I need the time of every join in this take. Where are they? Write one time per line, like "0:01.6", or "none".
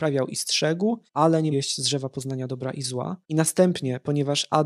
0:01.1
0:01.5
0:03.2